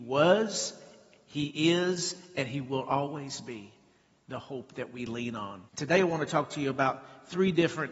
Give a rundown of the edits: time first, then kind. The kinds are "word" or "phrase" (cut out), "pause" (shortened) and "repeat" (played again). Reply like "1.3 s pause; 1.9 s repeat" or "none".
5.7 s pause